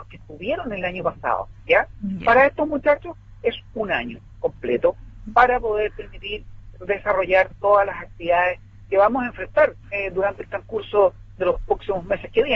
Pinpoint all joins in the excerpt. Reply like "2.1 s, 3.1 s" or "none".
9.8 s